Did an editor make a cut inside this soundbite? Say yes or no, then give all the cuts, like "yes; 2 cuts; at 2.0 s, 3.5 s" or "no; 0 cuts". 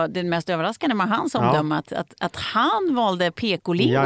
no; 0 cuts